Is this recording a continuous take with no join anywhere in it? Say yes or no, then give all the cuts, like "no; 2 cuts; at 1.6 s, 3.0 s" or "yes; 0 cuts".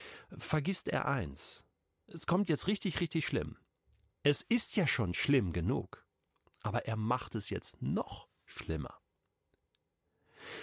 yes; 0 cuts